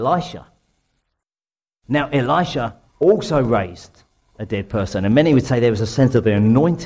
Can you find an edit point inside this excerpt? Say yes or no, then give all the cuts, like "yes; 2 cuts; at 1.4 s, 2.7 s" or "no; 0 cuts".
yes; 1 cut; at 2.9 s